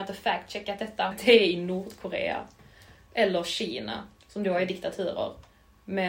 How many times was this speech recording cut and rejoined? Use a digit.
2